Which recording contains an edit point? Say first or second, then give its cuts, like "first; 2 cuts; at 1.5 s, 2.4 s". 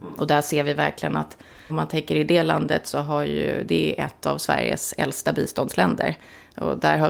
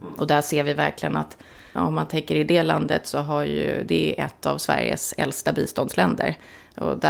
first; 1 cut; at 1.7 s